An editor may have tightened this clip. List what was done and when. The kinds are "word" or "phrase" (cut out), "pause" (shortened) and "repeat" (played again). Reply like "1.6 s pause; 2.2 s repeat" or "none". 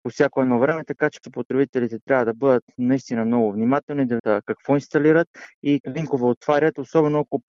1.2 s word; 4.2 s word; 5.8 s word